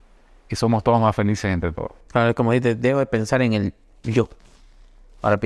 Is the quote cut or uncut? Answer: uncut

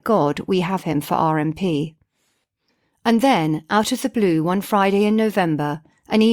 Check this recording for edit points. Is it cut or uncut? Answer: uncut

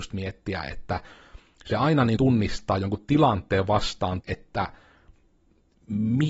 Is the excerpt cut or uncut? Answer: cut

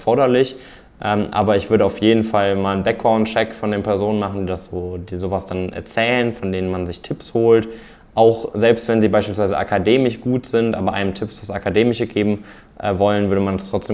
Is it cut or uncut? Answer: uncut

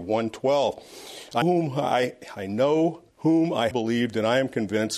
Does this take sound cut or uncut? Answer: cut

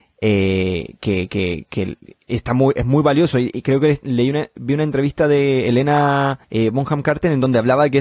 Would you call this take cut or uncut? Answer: cut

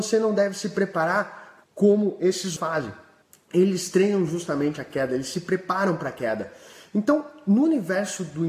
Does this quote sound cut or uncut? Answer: cut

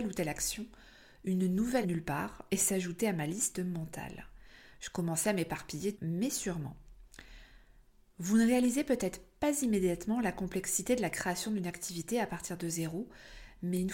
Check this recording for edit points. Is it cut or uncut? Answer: cut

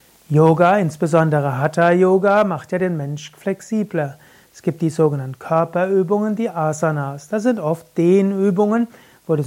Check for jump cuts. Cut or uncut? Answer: uncut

